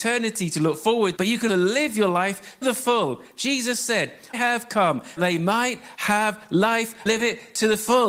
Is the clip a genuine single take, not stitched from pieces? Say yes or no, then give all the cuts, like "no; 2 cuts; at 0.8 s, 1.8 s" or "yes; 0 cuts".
no; 6 cuts; at 1.2 s, 1.5 s, 2.6 s, 4.3 s, 5.2 s, 7.1 s